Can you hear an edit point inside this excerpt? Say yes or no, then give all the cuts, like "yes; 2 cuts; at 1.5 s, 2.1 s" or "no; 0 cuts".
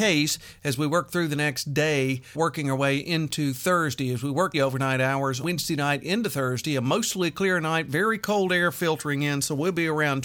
yes; 3 cuts; at 2.3 s, 4.5 s, 5.4 s